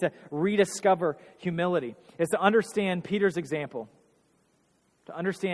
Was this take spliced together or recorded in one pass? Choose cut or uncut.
uncut